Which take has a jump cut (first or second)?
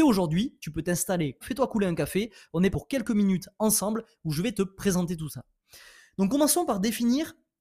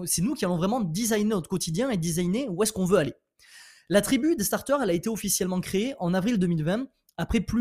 first